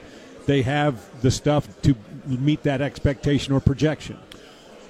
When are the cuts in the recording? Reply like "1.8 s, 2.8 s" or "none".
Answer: 1.7 s

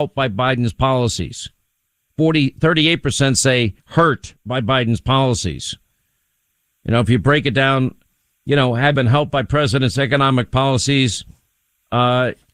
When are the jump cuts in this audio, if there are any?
8.9 s

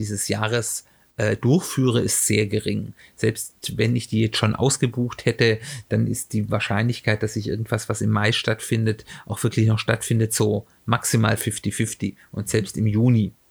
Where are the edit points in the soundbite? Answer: none

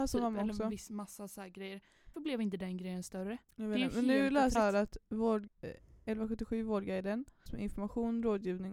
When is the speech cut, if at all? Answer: 2.1 s, 3.4 s, 4.5 s, 5.5 s, 7.5 s

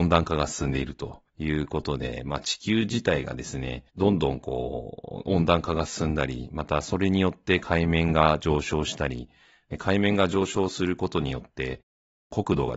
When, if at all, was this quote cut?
1.3 s, 3.9 s

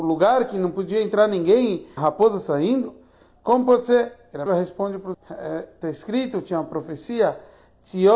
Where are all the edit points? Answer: 2.0 s, 4.5 s, 5.1 s

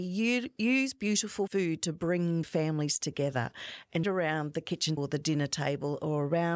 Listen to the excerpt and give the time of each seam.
1.5 s, 2.4 s, 4.0 s, 5.0 s

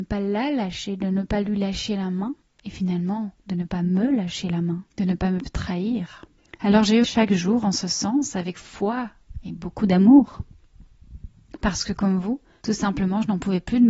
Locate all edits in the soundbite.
2.4 s, 4.9 s, 6.4 s, 7.0 s

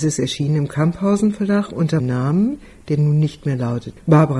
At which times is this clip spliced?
2.0 s

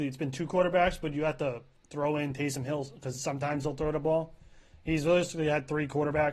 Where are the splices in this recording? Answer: none

